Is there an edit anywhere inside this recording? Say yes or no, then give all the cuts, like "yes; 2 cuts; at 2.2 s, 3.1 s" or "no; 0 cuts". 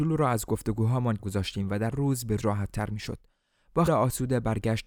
yes; 4 cuts; at 1.2 s, 1.9 s, 2.4 s, 3.9 s